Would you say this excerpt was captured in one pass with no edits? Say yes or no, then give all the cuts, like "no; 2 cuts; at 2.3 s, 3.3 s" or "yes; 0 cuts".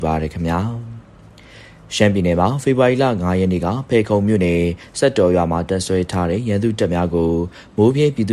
yes; 0 cuts